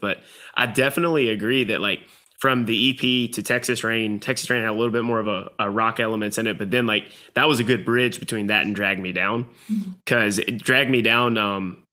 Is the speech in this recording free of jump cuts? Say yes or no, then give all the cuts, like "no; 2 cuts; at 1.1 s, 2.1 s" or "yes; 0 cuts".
yes; 0 cuts